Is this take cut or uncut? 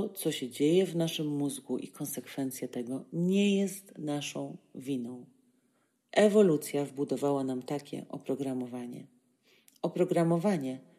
uncut